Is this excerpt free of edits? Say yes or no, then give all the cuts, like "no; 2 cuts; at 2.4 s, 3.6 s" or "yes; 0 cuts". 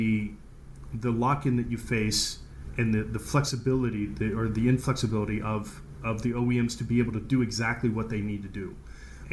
yes; 0 cuts